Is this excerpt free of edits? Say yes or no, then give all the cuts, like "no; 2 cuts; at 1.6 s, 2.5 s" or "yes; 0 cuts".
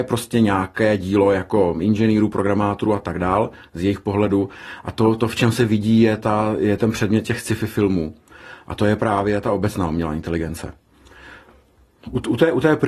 yes; 0 cuts